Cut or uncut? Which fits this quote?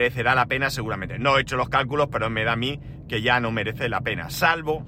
uncut